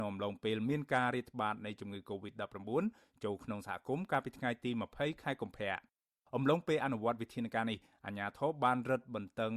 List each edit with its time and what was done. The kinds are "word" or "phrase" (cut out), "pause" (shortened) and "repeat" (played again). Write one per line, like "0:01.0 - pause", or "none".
none